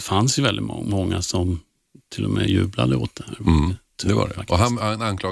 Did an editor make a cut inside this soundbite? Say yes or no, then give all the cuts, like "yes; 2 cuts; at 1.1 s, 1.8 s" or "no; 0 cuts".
no; 0 cuts